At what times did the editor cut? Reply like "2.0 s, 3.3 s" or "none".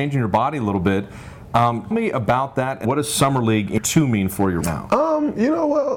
1.9 s, 2.8 s, 3.8 s, 4.6 s